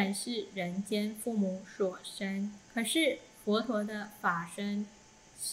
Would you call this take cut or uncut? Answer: cut